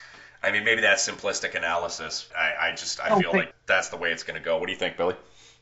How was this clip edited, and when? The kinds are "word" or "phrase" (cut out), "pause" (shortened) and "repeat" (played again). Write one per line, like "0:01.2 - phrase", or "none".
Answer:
0:02.3 - word
0:03.5 - word